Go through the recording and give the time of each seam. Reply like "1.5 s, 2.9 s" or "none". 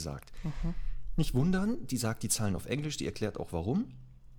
none